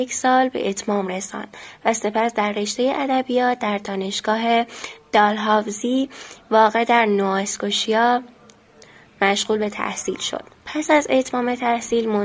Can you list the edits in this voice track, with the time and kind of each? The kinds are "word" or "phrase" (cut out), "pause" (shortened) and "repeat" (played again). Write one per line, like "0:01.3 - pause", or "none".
0:10.5 - pause